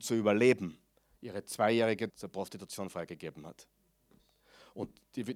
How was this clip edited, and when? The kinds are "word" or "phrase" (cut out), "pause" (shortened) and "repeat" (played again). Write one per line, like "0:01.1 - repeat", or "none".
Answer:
0:02.1 - word